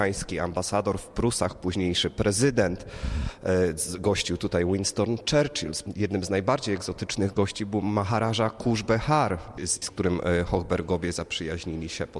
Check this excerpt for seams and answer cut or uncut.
cut